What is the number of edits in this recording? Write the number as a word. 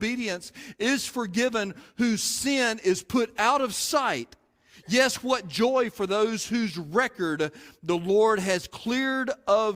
zero